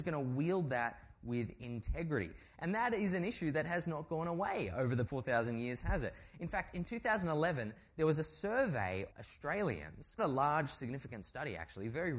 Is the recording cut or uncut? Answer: cut